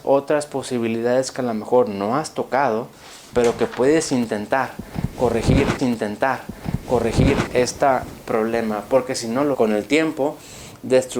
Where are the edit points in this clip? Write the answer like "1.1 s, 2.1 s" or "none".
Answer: 5.8 s, 9.5 s

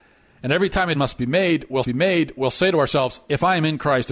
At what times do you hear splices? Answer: 0.9 s, 1.8 s

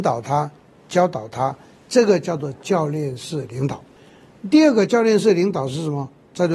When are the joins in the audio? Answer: none

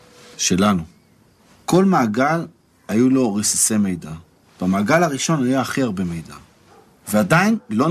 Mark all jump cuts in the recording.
none

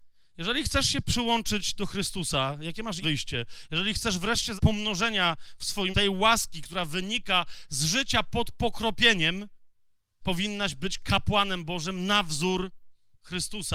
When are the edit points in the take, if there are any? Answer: 3.0 s, 4.6 s, 5.9 s, 10.2 s

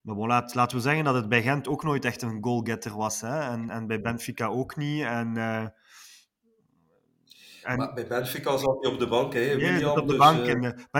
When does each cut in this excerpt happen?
3.7 s

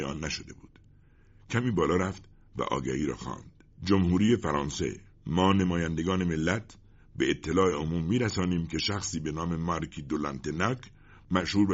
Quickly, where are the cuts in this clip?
3.7 s, 5.1 s

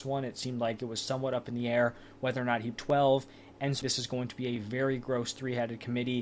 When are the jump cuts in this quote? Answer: 2.8 s, 3.8 s

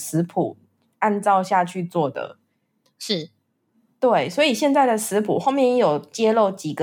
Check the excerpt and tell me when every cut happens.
none

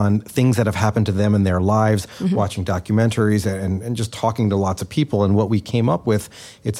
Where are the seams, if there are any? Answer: none

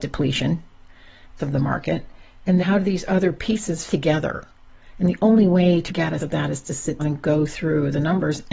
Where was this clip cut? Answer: 1.4 s, 2.6 s, 3.9 s, 5.9 s, 6.2 s, 7.0 s

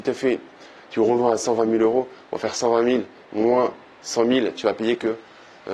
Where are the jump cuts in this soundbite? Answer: none

